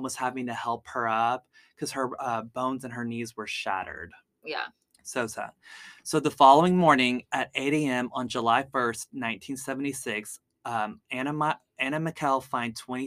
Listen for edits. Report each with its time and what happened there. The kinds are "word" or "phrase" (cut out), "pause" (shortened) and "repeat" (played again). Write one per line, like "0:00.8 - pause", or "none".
none